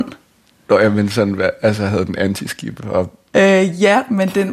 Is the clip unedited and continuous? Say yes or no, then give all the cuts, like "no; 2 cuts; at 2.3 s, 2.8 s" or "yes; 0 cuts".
yes; 0 cuts